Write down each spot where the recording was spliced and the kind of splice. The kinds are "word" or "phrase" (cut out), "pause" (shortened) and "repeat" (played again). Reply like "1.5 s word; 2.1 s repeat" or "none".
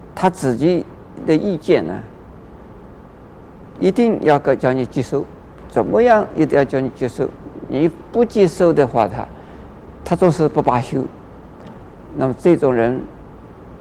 none